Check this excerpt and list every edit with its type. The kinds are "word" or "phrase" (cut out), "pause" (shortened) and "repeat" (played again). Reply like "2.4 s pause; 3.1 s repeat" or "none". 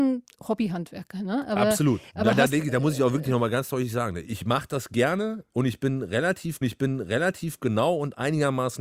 6.6 s repeat